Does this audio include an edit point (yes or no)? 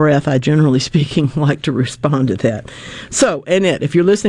no